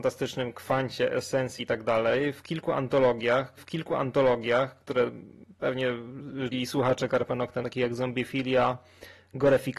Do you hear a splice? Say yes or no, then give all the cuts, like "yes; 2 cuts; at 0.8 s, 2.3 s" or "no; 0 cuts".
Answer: yes; 4 cuts; at 1.6 s, 3.6 s, 6.5 s, 7.6 s